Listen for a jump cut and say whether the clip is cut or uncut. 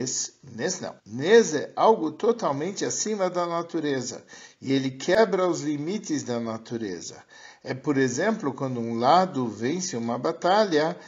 cut